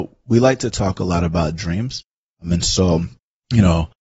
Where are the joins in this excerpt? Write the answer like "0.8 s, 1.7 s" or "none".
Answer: none